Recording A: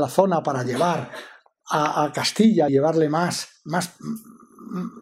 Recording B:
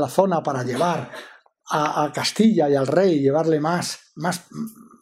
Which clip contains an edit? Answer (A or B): A